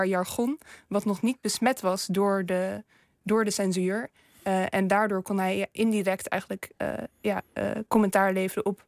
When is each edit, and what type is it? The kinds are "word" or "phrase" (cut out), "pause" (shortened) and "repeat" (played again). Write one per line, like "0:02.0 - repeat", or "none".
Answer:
none